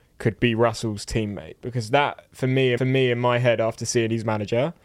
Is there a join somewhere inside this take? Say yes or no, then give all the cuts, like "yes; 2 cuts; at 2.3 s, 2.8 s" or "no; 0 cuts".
yes; 1 cut; at 2.8 s